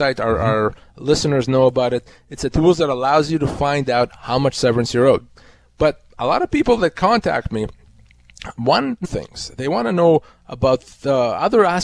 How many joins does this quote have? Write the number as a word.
one